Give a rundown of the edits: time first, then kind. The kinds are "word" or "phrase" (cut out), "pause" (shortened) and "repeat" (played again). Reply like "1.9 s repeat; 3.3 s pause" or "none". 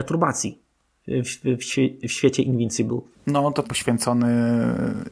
3.6 s phrase